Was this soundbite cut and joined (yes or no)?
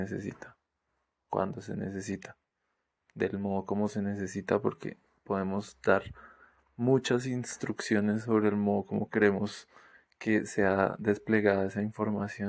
no